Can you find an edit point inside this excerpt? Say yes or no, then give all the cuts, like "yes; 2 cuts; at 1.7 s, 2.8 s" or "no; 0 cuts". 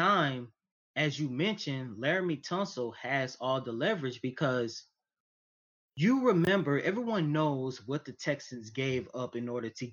no; 0 cuts